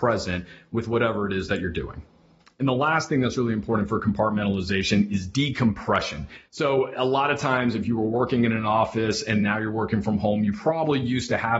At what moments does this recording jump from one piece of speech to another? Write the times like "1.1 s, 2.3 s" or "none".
none